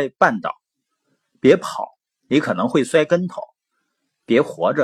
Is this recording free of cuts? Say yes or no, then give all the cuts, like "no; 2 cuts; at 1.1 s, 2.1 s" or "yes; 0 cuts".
yes; 0 cuts